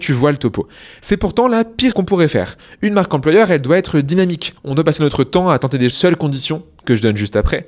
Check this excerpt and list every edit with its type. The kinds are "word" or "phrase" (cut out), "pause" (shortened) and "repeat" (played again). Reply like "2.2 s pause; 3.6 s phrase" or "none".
1.9 s word; 4.6 s pause; 5.9 s phrase